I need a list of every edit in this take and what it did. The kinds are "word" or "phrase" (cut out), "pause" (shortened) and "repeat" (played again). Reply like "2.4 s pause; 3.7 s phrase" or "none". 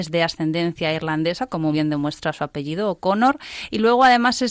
1.7 s word